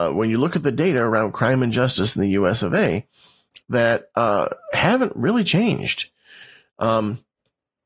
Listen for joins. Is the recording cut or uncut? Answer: uncut